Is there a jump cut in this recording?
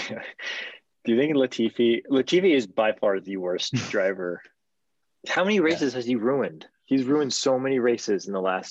no; 0 cuts

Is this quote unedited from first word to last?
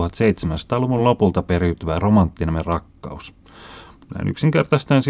yes; 0 cuts

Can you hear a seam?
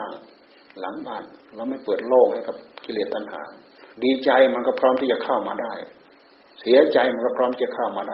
yes; 1 cut; at 3.9 s

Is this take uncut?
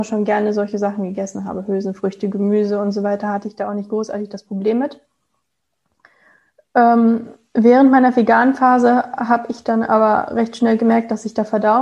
yes; 0 cuts

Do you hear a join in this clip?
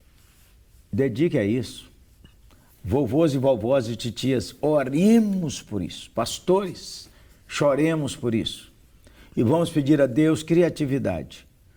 no; 0 cuts

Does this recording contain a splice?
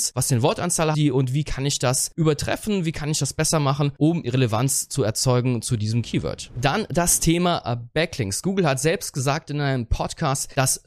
yes; 2 cuts; at 0.9 s, 4.2 s

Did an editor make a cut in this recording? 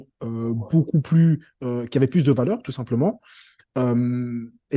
no; 0 cuts

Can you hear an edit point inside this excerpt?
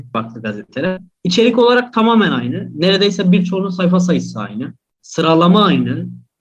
no; 0 cuts

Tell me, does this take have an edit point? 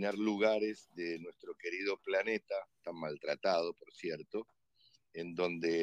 no; 0 cuts

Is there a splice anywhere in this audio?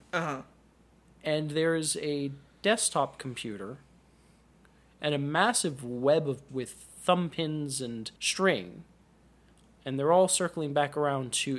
yes; 2 cuts; at 6.5 s, 8.2 s

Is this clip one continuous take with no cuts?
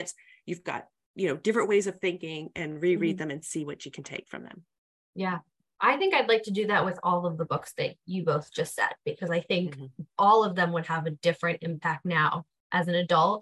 yes; 0 cuts

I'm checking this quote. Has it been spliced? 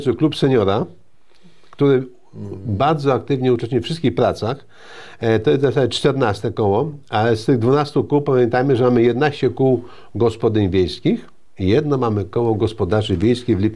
no; 0 cuts

